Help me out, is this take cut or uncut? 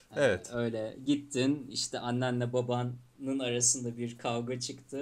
uncut